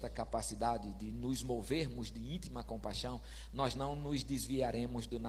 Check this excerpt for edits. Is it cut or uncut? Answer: uncut